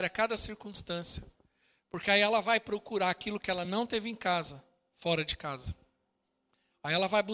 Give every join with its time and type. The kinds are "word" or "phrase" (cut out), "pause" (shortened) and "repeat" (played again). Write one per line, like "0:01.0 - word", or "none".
none